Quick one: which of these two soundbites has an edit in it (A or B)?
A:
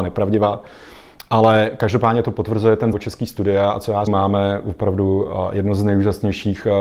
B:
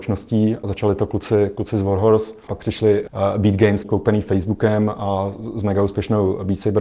A